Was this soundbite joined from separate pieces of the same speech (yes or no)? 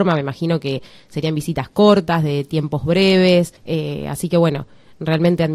yes